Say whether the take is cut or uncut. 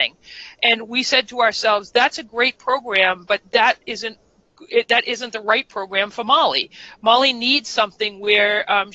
uncut